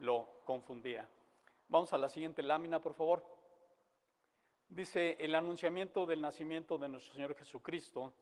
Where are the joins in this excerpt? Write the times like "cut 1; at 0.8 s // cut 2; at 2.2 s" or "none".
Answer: none